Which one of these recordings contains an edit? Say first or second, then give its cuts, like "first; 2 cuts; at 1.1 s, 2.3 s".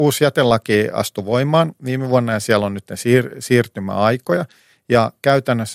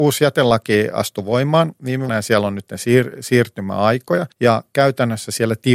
second; 2 cuts; at 2.1 s, 4.3 s